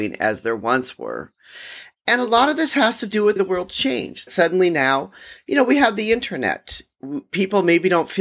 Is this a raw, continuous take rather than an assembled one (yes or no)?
no